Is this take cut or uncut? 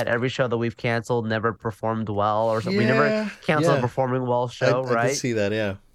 uncut